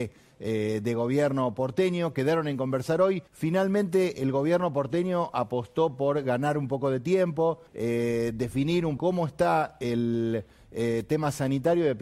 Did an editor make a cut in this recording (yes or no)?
yes